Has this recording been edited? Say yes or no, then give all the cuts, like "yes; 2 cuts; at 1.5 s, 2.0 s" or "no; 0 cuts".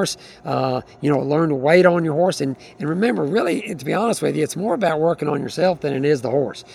no; 0 cuts